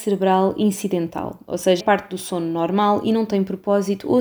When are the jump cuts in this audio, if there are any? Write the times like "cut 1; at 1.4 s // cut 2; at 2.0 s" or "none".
cut 1; at 1.8 s